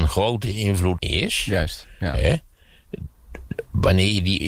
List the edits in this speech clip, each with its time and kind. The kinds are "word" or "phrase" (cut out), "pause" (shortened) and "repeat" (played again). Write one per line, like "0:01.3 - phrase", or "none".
0:01.0 - word